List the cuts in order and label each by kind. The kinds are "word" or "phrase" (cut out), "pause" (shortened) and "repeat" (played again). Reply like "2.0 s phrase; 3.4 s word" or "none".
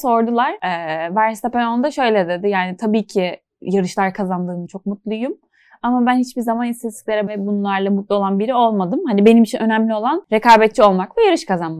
4.7 s word; 7.3 s word